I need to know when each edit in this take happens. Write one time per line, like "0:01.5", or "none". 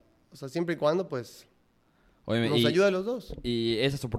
none

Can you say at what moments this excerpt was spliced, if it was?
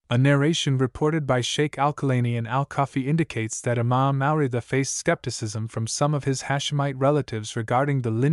none

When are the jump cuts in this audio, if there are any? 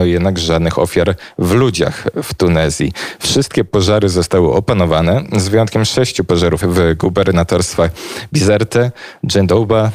0:06.6

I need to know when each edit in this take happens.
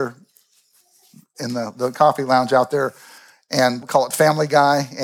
0:03.8

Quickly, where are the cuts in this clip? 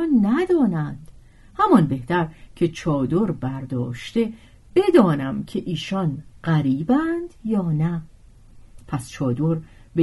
none

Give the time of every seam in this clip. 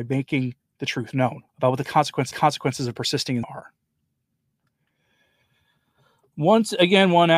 0:01.5
0:02.3
0:03.4

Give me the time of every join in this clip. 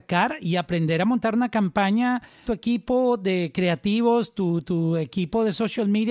0:02.5

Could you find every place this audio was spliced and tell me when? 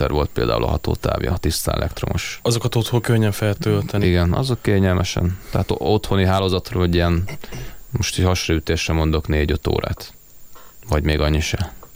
0:03.5

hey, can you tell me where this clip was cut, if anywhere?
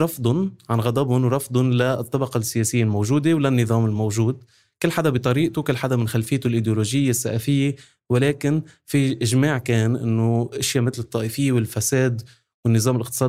none

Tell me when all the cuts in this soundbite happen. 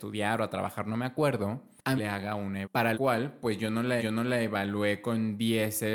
0:02.0
0:02.6
0:02.9
0:04.0

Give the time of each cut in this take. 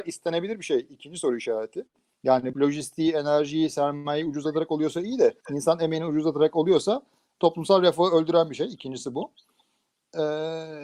0:02.5
0:05.4

